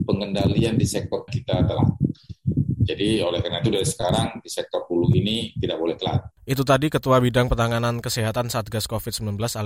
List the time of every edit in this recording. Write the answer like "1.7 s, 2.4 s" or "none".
1.3 s, 6.4 s